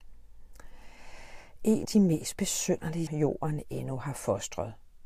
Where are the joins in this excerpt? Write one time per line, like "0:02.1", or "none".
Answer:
0:01.8
0:03.1